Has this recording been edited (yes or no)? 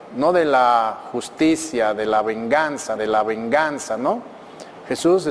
yes